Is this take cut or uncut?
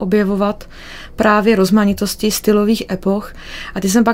uncut